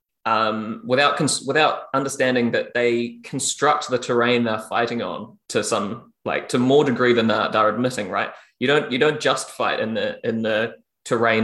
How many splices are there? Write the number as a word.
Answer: one